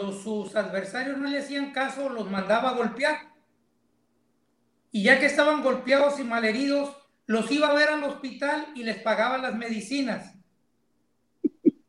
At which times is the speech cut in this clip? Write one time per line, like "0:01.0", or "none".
none